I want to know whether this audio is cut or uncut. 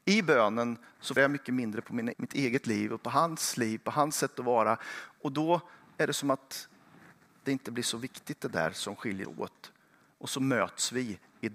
cut